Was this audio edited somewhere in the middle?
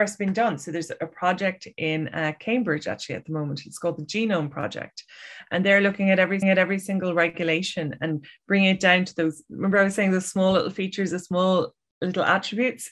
yes; 1 cut; at 6.4 s

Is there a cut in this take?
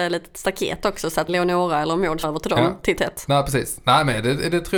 yes; 3 cuts; at 1.3 s, 2.2 s, 3.0 s

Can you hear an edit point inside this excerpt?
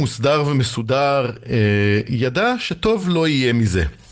no; 0 cuts

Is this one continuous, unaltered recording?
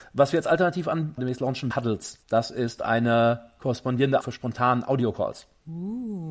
no; 4 cuts; at 1.2 s, 1.7 s, 2.2 s, 4.2 s

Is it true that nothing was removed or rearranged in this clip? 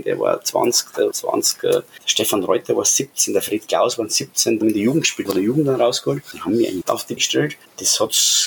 no; 5 cuts; at 1.1 s, 4.6 s, 5.3 s, 6.8 s, 7.2 s

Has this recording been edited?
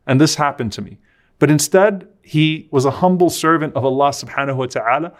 no; 0 cuts

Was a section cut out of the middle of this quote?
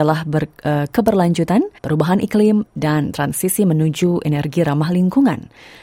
yes; 1 cut; at 1.8 s

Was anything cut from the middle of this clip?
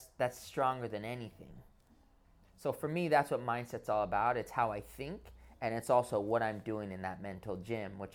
no; 0 cuts

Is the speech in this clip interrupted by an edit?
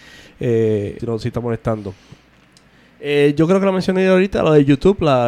yes; 2 cuts; at 1.0 s, 1.3 s

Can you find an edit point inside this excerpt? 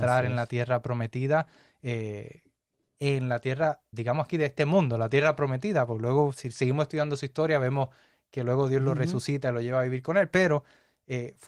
yes; 1 cut; at 3.9 s

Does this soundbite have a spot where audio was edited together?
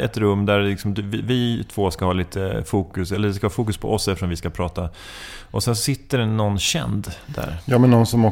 no; 0 cuts

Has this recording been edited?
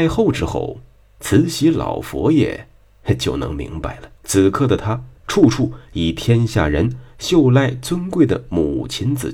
yes; 2 cuts; at 4.2 s, 5.2 s

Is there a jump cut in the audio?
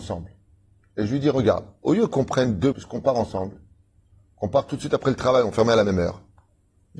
yes; 1 cut; at 2.7 s

